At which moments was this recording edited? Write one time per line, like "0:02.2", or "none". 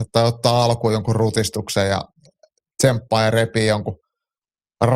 none